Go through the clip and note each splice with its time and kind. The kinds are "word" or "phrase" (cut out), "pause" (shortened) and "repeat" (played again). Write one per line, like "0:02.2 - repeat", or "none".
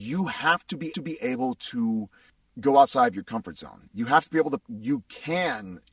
0:00.9 - repeat
0:04.6 - word